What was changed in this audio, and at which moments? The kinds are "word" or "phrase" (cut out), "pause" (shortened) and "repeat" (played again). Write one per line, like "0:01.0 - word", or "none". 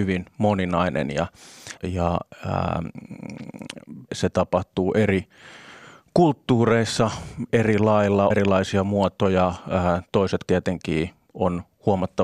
0:01.8 - word
0:04.1 - word
0:07.5 - word
0:08.3 - word
0:10.5 - word

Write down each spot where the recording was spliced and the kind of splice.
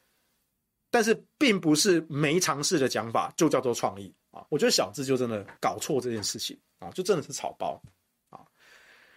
0:04.5 - pause
0:05.6 - pause

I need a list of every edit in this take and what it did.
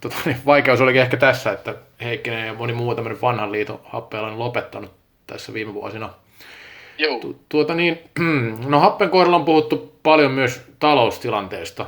none

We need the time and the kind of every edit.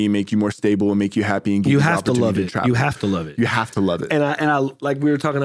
none

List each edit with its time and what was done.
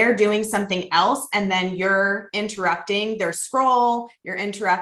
none

